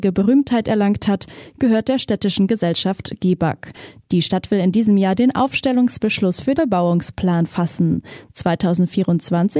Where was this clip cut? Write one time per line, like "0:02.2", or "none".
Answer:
0:06.6